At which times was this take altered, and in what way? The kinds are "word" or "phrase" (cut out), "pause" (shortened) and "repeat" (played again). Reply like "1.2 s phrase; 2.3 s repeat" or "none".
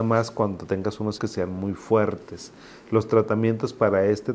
1.2 s word